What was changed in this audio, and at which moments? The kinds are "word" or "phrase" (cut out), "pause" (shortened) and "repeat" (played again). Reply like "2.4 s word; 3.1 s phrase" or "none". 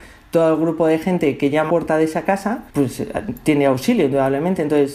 1.7 s phrase; 2.7 s word